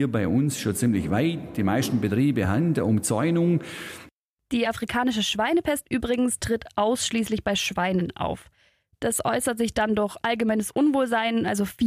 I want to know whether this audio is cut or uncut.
uncut